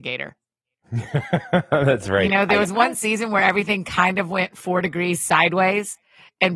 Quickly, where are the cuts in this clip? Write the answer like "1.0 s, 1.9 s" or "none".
none